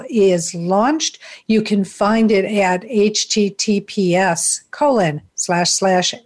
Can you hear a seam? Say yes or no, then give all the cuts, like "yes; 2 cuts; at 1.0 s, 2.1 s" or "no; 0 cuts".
no; 0 cuts